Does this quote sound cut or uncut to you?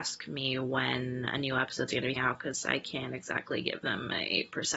cut